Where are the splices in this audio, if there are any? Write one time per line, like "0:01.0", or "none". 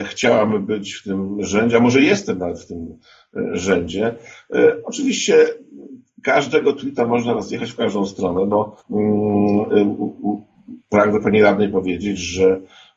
0:08.8